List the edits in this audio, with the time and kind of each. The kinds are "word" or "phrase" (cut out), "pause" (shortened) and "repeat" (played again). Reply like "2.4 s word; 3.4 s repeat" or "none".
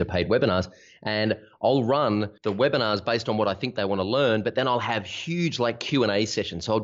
2.4 s pause